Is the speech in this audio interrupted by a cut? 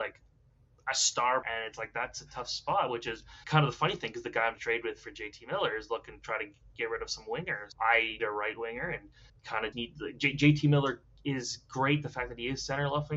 yes; 7 cuts; at 1.4 s, 3.4 s, 4.5 s, 7.7 s, 8.2 s, 9.3 s, 9.7 s

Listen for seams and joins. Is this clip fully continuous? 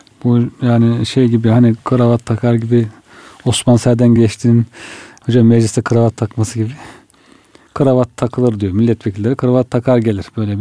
yes; 0 cuts

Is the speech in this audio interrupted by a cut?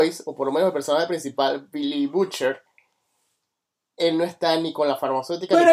no; 0 cuts

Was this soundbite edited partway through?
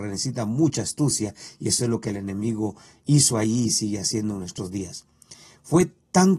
no; 0 cuts

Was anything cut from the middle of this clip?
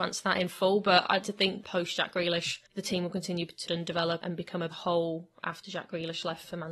yes; 6 cuts; at 1.2 s, 1.6 s, 2.7 s, 3.7 s, 4.2 s, 4.7 s

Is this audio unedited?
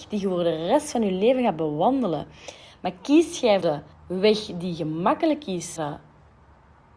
no; 3 cuts; at 3.6 s, 3.9 s, 5.8 s

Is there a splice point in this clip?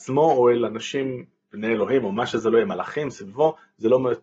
no; 0 cuts

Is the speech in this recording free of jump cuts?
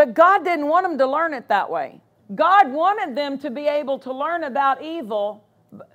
no; 1 cut; at 2.2 s

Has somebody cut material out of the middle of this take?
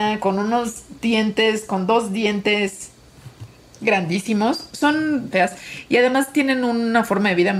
yes; 1 cut; at 5.3 s

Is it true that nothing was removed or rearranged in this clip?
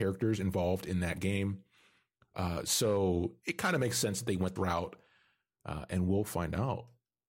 no; 1 cut; at 4.6 s

